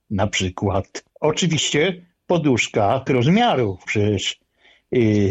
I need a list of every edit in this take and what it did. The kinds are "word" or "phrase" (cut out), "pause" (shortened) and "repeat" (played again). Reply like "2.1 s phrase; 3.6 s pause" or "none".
1.1 s pause; 3.1 s word; 3.9 s word